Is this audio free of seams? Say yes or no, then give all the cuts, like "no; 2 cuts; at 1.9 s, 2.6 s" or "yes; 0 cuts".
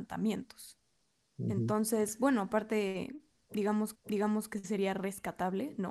no; 2 cuts; at 2.5 s, 3.9 s